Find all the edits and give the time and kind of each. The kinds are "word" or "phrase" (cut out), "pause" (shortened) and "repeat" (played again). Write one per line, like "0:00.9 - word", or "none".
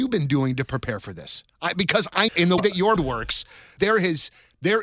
0:02.3 - word
0:02.6 - word
0:03.0 - word
0:03.8 - word